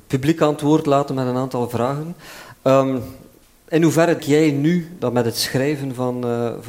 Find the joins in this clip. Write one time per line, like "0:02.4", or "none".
0:03.4
0:04.2
0:05.0